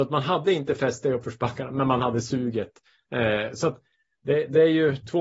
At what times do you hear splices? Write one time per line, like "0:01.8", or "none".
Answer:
none